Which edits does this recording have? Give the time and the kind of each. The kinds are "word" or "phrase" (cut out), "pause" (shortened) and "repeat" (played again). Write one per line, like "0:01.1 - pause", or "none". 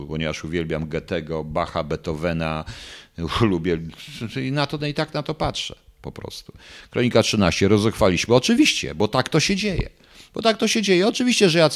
none